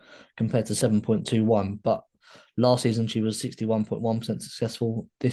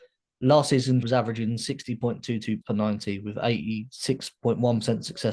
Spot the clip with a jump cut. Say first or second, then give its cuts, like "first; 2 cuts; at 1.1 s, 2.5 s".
second; 2 cuts; at 1.0 s, 2.6 s